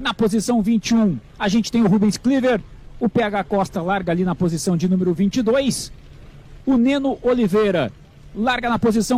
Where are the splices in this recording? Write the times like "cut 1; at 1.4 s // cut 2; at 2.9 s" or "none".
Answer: cut 1; at 1.3 s